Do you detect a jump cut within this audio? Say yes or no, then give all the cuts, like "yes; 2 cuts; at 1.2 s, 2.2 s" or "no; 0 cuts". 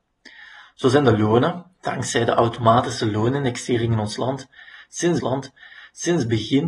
yes; 1 cut; at 5.2 s